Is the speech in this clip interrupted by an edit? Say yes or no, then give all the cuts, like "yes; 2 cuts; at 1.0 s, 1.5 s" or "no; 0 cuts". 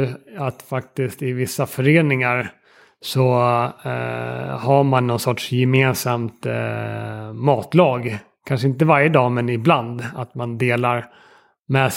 no; 0 cuts